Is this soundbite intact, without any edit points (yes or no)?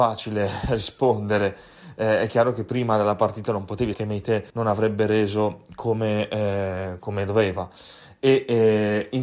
no